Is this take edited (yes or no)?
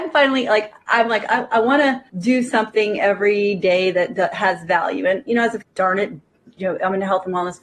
yes